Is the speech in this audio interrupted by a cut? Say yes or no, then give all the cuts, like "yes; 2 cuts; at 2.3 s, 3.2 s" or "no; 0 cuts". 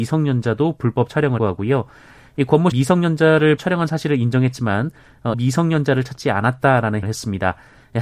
yes; 5 cuts; at 1.4 s, 2.7 s, 3.6 s, 5.3 s, 7.0 s